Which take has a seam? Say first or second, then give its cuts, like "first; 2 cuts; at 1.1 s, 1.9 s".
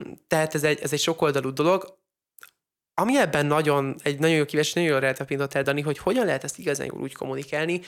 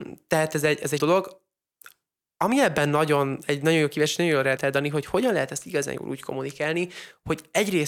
second; 2 cuts; at 1.0 s, 4.6 s